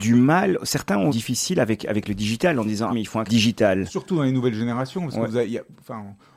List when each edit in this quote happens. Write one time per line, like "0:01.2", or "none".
0:01.1
0:02.9
0:03.3